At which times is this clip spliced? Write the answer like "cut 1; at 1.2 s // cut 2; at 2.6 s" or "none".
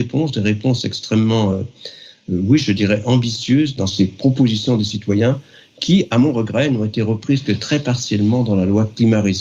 none